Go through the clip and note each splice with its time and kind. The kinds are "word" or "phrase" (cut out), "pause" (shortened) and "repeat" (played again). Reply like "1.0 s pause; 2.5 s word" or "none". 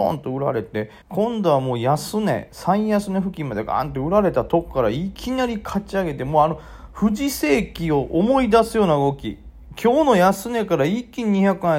1.0 s pause